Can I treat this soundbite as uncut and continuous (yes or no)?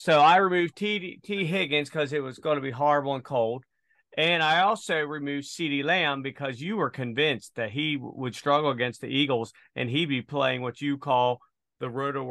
yes